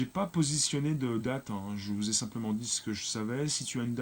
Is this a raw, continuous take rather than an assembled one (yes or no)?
no